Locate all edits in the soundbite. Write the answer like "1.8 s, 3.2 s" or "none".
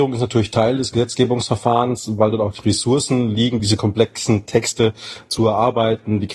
none